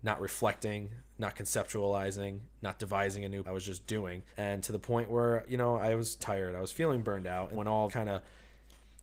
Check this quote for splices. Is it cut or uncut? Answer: cut